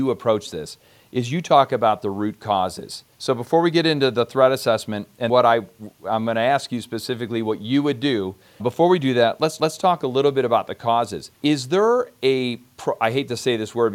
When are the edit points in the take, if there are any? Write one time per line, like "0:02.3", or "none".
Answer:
0:03.1
0:05.3
0:08.6
0:09.6
0:11.3